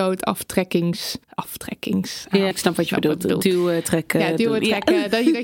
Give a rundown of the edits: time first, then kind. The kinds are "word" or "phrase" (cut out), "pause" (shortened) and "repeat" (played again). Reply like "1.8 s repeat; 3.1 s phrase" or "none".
1.2 s pause; 2.5 s phrase